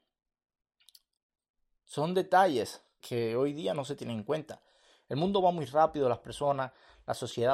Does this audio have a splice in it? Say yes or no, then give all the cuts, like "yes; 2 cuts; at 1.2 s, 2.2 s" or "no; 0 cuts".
yes; 1 cut; at 3.0 s